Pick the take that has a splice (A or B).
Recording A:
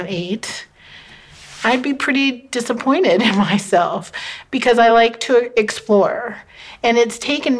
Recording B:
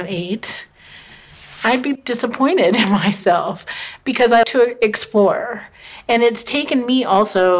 B